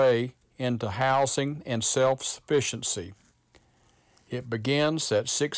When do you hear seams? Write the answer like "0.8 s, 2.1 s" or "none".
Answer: none